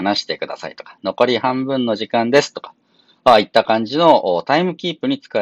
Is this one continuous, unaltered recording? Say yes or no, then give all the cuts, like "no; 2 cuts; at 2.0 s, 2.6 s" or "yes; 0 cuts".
yes; 0 cuts